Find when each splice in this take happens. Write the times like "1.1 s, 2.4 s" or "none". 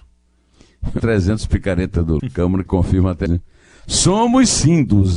1.0 s, 2.2 s, 2.7 s, 3.3 s